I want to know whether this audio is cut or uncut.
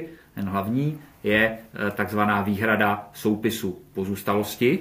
uncut